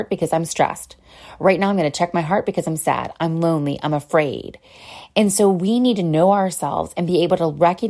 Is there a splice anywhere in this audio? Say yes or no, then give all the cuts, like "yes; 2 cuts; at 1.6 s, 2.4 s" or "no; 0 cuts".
no; 0 cuts